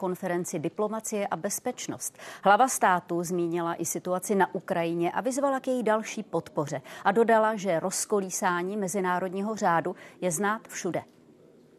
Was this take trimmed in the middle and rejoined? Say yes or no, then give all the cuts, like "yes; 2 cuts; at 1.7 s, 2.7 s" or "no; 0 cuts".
yes; 1 cut; at 10.7 s